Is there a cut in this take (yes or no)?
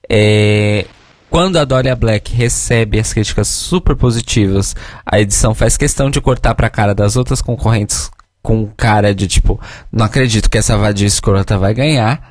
yes